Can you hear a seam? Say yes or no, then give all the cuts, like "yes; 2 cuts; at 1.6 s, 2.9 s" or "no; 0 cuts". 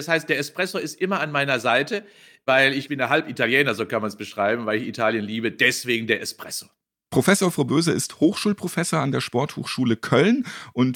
no; 0 cuts